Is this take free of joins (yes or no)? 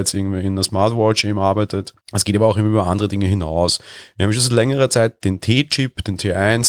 no